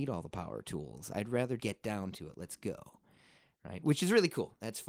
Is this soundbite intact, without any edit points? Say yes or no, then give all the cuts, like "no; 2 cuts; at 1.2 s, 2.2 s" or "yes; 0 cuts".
no; 1 cut; at 1.6 s